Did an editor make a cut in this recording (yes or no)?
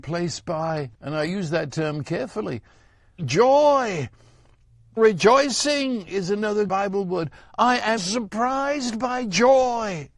yes